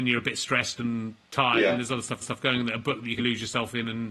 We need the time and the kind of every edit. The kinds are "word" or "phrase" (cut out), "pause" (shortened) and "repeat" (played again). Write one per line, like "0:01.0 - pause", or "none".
0:01.2 - pause
0:02.2 - repeat
0:03.2 - word